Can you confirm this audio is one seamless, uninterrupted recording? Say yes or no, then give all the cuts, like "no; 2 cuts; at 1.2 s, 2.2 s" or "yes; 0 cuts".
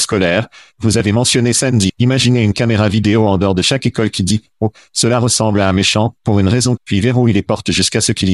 no; 2 cuts; at 1.9 s, 6.8 s